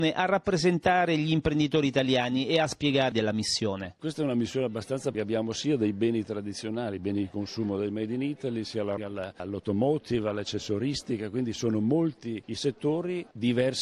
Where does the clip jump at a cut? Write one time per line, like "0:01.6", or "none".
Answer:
0:03.1
0:05.1
0:09.0